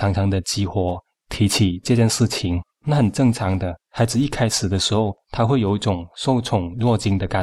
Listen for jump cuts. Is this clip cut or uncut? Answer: cut